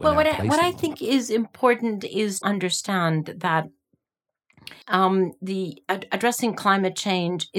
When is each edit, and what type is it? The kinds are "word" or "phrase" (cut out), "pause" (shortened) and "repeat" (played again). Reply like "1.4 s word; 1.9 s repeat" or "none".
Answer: 2.4 s word; 4.8 s pause